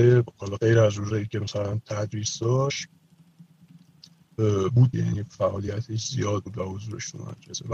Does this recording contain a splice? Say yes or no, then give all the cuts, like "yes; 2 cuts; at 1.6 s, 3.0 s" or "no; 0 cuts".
yes; 1 cut; at 4.9 s